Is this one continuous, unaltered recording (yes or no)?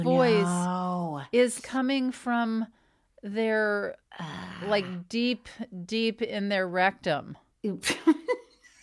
no